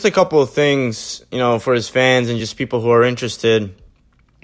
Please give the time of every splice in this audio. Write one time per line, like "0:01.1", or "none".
none